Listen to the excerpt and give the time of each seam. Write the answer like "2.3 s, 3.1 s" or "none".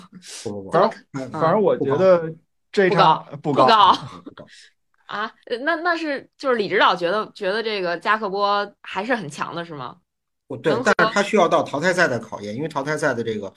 8.8 s